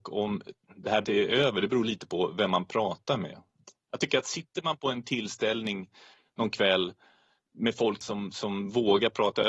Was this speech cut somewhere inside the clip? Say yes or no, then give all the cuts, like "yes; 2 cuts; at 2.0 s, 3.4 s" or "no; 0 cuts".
yes; 2 cuts; at 1.0 s, 8.0 s